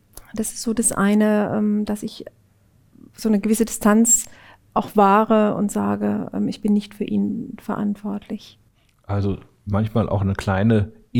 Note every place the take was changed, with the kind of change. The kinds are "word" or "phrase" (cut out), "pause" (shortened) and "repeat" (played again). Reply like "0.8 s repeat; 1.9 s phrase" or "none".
none